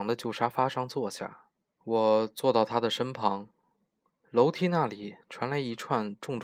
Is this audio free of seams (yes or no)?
yes